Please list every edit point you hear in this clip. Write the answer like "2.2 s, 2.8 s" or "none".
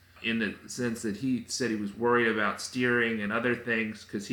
none